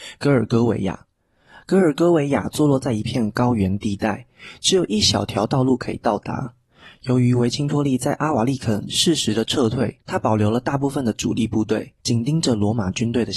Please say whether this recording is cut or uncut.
cut